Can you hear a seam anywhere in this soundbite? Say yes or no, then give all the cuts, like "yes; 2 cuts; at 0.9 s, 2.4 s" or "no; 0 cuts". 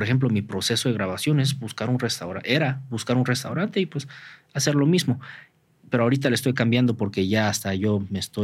no; 0 cuts